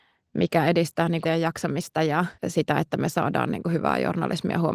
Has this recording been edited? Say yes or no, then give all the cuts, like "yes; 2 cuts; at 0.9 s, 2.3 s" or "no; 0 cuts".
yes; 2 cuts; at 1.2 s, 2.4 s